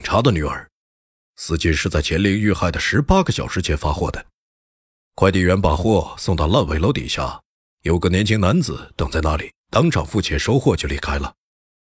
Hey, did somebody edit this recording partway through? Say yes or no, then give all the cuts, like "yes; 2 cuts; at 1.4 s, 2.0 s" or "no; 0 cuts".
yes; 1 cut; at 9.6 s